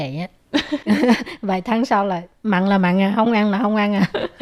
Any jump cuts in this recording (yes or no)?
no